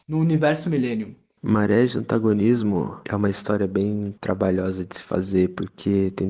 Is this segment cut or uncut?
uncut